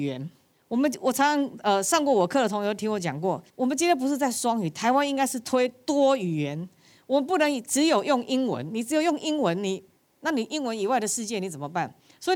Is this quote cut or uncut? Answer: cut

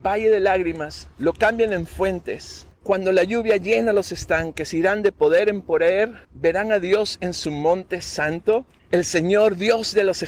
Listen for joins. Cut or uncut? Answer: cut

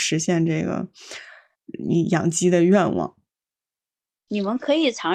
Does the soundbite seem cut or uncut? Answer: uncut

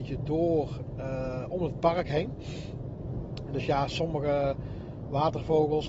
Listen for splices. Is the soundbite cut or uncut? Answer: uncut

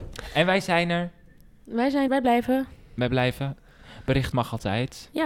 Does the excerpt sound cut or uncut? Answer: cut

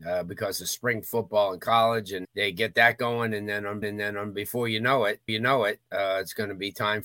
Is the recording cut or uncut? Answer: cut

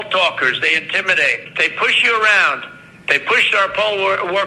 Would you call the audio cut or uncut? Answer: uncut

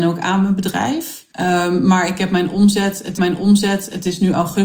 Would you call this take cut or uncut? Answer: cut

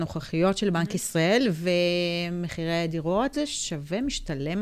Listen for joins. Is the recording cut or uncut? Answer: cut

